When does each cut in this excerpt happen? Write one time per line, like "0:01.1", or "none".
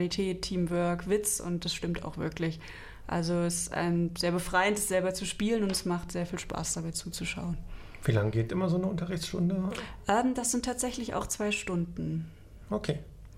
none